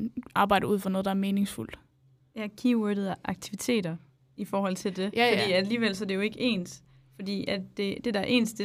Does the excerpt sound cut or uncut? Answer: uncut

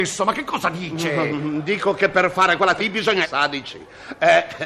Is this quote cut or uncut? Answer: cut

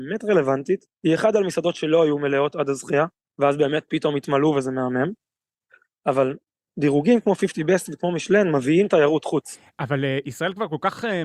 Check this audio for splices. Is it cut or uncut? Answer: cut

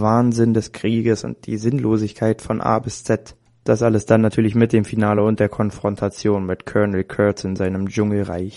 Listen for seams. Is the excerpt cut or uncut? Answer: uncut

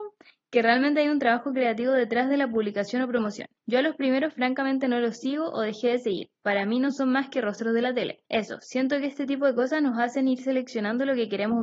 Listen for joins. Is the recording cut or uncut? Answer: cut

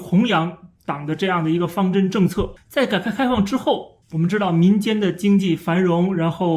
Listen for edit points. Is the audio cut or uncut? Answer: cut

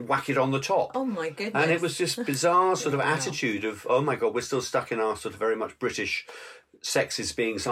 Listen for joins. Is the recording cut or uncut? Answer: uncut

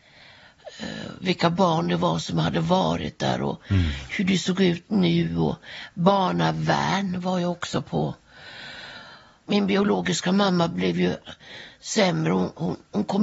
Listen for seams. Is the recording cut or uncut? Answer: uncut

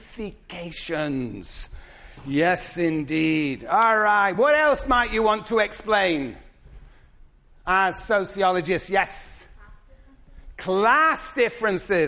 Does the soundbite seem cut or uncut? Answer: uncut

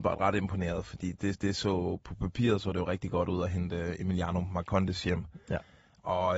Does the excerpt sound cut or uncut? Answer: cut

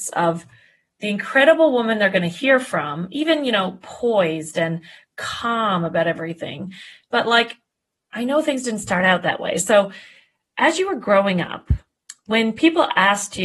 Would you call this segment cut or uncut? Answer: uncut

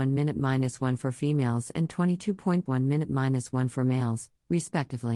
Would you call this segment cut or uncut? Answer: cut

